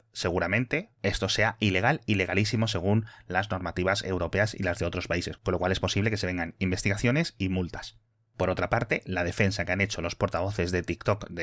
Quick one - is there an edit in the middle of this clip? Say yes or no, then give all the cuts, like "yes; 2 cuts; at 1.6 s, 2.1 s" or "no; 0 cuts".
no; 0 cuts